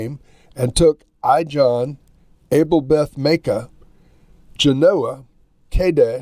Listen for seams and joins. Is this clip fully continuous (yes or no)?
yes